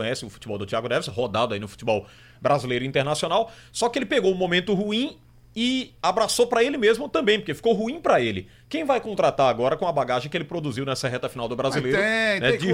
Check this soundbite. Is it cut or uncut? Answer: uncut